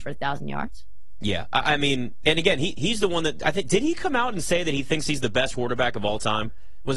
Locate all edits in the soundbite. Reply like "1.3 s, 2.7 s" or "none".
5.5 s